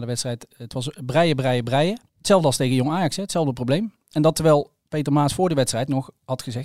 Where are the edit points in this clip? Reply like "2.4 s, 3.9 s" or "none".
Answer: 2.1 s